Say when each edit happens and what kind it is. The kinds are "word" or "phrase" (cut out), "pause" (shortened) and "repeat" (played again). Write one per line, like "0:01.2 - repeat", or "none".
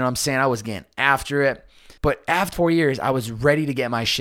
0:02.0 - pause
0:02.5 - word